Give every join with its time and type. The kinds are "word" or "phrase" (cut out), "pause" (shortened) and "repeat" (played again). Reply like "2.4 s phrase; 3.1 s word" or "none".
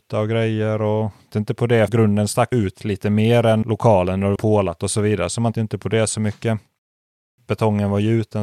1.3 s word; 1.9 s word; 2.5 s word; 3.6 s word; 4.4 s word; 5.5 s word